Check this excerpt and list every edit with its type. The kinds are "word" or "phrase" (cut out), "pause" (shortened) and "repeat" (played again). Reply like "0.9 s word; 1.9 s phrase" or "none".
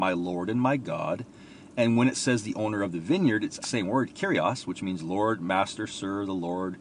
3.6 s word